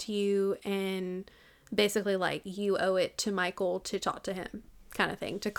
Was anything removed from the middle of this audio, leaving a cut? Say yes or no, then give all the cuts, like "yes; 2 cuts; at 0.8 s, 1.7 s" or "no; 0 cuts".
no; 0 cuts